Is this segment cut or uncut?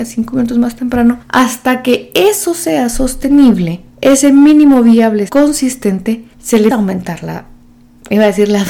cut